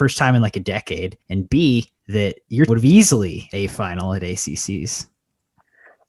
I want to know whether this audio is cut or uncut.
cut